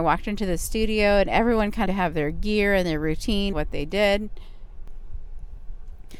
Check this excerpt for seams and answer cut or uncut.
cut